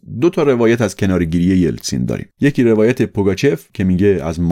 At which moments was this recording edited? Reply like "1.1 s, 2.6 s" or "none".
2.3 s